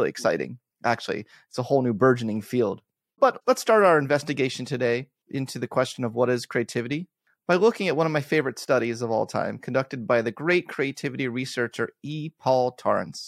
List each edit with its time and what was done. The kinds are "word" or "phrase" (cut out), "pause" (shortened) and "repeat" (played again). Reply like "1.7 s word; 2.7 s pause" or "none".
none